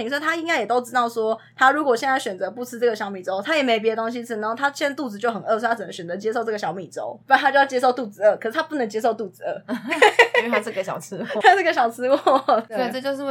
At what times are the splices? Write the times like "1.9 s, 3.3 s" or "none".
7.2 s, 11.4 s